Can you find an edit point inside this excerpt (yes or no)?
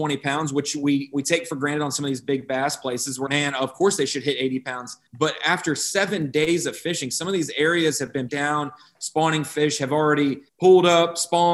yes